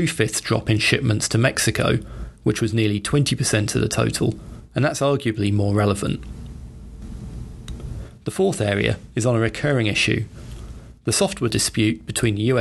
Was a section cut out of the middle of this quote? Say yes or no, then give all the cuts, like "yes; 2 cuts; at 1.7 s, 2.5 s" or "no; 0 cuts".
yes; 1 cut; at 11.5 s